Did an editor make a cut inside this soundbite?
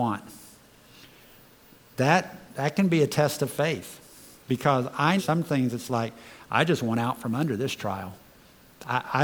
yes; 1 cut; at 5.2 s

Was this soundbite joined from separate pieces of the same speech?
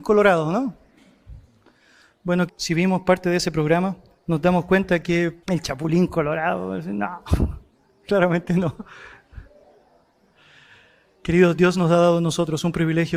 yes; 2 cuts; at 2.5 s, 5.4 s

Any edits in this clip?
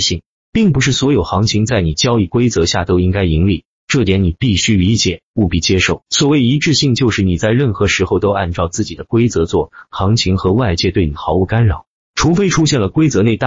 no; 0 cuts

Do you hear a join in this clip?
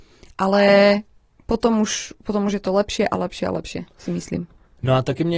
no; 0 cuts

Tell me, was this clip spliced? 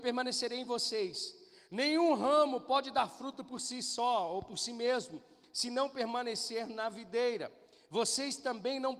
no; 0 cuts

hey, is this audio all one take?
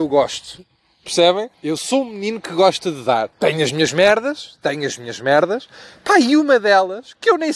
no; 2 cuts; at 1.5 s, 3.3 s

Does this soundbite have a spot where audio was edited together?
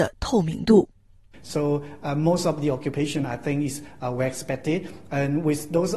no; 0 cuts

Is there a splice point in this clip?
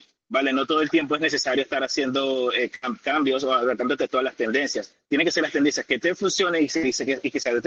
no; 0 cuts

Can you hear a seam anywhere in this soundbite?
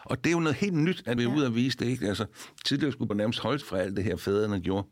yes; 3 cuts; at 1.2 s, 3.1 s, 3.6 s

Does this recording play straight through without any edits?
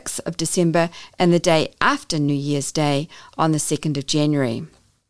yes; 0 cuts

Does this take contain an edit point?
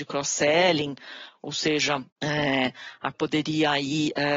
yes; 2 cuts; at 2.1 s, 3.1 s

